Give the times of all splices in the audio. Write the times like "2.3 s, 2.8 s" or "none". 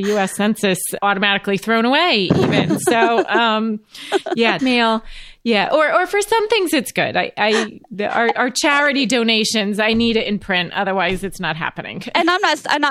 1.0 s, 4.6 s